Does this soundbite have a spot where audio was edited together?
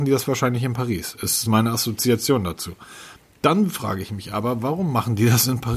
yes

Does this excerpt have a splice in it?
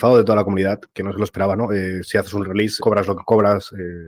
yes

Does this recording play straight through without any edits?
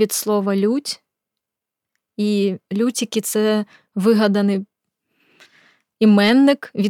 yes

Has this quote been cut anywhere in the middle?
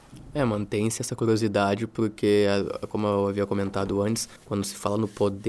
yes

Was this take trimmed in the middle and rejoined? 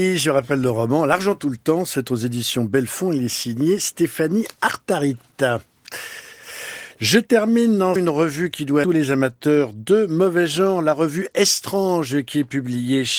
yes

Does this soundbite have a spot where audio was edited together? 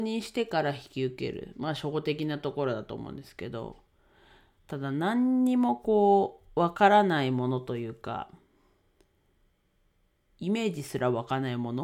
no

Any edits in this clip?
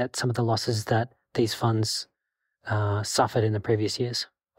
no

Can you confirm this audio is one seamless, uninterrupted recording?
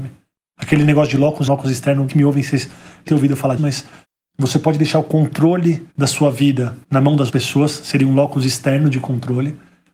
no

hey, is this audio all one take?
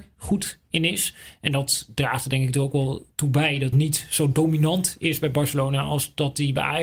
no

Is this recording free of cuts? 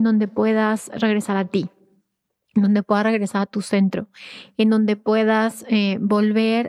yes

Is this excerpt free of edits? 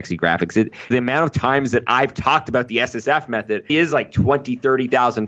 no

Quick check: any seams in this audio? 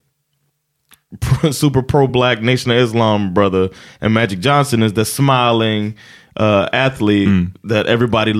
no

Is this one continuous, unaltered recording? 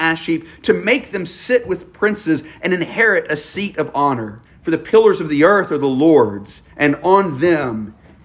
no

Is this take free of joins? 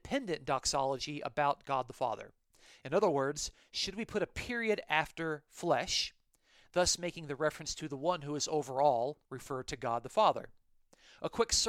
no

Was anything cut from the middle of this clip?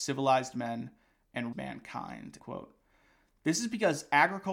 yes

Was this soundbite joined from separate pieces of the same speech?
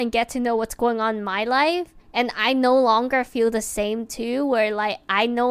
yes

